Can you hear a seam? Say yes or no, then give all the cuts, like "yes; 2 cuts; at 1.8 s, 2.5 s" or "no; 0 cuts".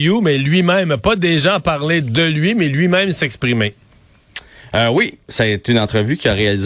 no; 0 cuts